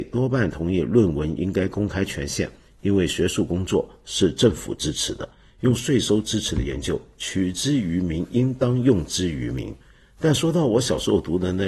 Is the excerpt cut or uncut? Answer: uncut